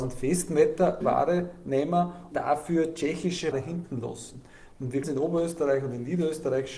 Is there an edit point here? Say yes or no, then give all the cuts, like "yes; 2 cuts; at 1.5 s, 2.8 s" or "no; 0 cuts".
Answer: yes; 4 cuts; at 1.0 s, 2.3 s, 3.5 s, 5.0 s